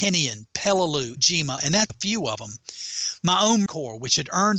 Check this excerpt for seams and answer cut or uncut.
cut